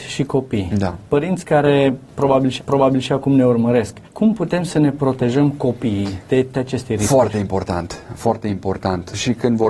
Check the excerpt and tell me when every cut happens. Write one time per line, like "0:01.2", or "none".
0:01.1
0:02.6
0:04.0
0:06.5